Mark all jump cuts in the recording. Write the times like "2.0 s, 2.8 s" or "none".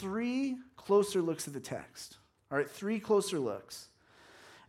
none